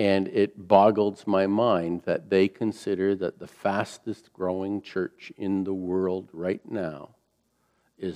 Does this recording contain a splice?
no; 0 cuts

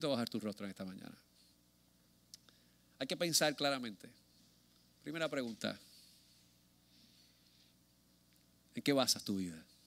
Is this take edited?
no; 0 cuts

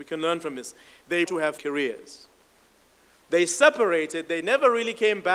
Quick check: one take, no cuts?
no; 2 cuts; at 1.3 s, 1.6 s

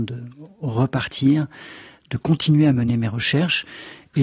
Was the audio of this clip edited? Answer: no; 0 cuts

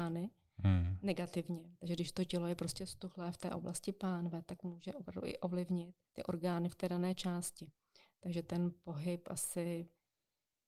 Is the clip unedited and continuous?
no; 1 cut; at 6.1 s

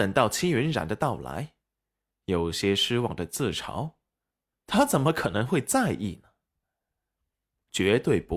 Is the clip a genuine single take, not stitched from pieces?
yes; 0 cuts

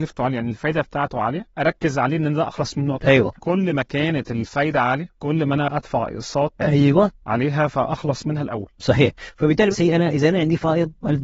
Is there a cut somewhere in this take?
yes; 2 cuts; at 3.0 s, 9.7 s

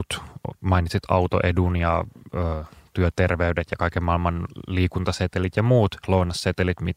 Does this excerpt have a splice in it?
no; 0 cuts

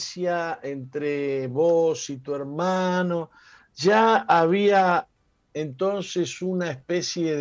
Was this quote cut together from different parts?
no; 0 cuts

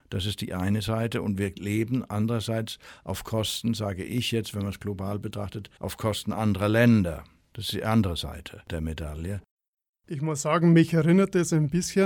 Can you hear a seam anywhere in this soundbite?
yes; 1 cut; at 5.8 s

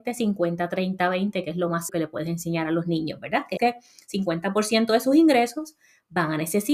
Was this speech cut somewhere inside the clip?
yes; 2 cuts; at 1.9 s, 3.6 s

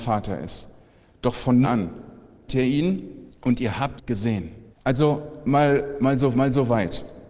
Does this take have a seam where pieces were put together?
yes; 6 cuts; at 1.6 s, 2.5 s, 3.3 s, 4.0 s, 4.7 s, 6.3 s

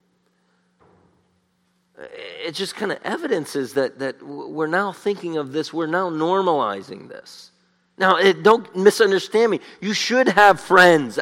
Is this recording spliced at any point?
no; 0 cuts

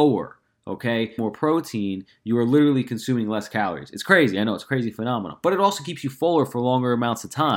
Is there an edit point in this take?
yes; 1 cut; at 1.2 s

